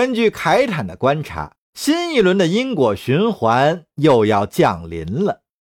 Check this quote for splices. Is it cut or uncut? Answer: cut